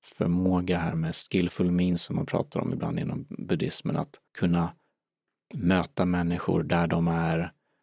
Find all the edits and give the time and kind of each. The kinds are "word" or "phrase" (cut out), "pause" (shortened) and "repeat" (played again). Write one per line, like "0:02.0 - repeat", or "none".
0:04.3 - pause